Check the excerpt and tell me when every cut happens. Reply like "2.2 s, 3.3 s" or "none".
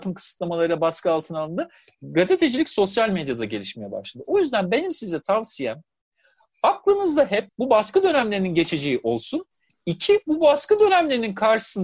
7.5 s